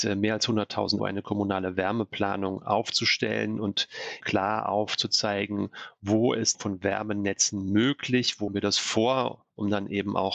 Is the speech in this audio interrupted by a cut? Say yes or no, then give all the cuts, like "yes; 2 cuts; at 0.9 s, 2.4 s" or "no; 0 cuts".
yes; 4 cuts; at 1.0 s, 4.2 s, 6.5 s, 8.5 s